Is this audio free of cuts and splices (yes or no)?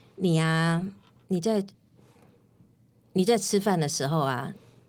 yes